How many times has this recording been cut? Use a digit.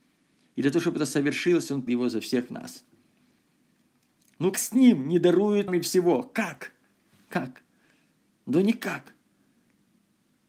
3